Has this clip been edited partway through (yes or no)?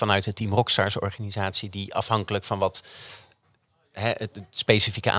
no